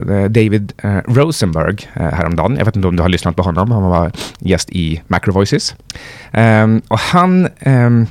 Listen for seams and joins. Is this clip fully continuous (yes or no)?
yes